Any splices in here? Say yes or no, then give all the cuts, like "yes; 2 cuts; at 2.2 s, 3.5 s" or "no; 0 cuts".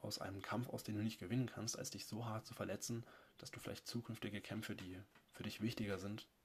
no; 0 cuts